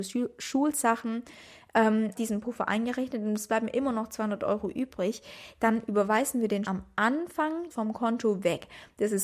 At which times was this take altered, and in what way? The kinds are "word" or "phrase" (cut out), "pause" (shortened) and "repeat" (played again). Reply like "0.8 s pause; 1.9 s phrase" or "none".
2.1 s phrase; 6.6 s word; 7.7 s phrase